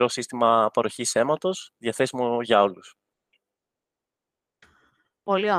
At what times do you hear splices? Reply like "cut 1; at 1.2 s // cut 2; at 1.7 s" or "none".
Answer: none